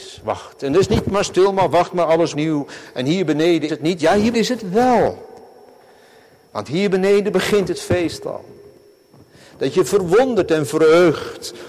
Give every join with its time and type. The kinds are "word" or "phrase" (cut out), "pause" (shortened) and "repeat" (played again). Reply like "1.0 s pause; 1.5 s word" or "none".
2.3 s word; 3.7 s word; 4.3 s word